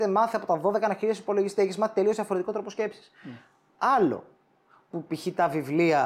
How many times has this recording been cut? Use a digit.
0